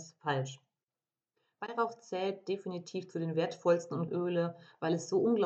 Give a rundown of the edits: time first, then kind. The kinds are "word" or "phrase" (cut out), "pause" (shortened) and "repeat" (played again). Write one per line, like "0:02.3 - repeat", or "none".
0:04.1 - word